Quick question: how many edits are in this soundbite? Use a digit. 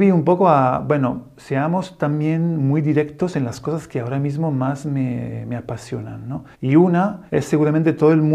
2